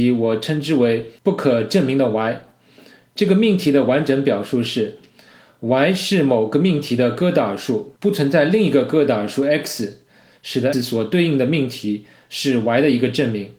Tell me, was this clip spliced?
yes; 3 cuts; at 1.2 s, 8.0 s, 10.7 s

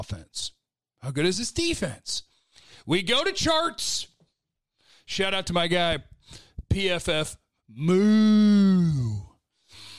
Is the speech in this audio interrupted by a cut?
no; 0 cuts

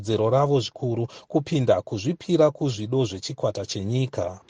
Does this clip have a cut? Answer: no; 0 cuts

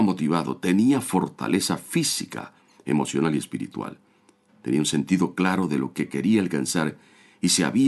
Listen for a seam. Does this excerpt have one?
no; 0 cuts

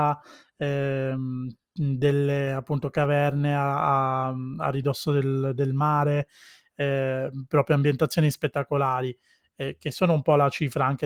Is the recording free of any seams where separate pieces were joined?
yes; 0 cuts

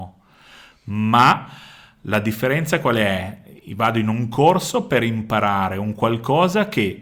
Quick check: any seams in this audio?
no; 0 cuts

